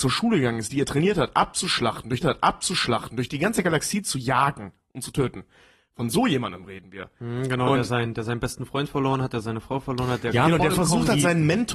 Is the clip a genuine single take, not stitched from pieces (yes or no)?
no